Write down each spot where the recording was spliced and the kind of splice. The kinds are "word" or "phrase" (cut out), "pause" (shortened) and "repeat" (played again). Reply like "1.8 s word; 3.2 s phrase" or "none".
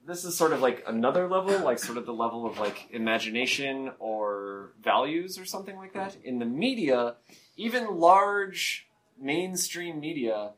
none